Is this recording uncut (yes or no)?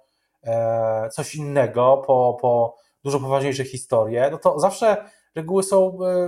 yes